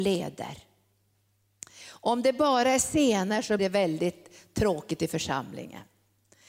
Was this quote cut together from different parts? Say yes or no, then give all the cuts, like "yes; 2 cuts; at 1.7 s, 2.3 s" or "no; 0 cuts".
yes; 1 cut; at 3.6 s